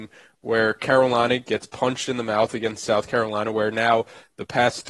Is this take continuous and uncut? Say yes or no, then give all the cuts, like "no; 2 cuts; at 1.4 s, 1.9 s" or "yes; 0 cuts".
yes; 0 cuts